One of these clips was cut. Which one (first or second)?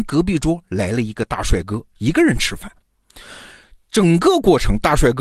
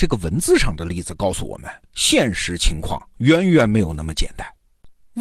second